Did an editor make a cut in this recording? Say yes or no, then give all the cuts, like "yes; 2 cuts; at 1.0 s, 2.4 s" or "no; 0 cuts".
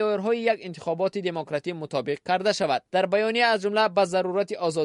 no; 0 cuts